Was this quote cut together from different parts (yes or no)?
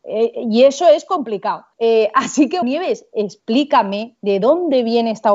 yes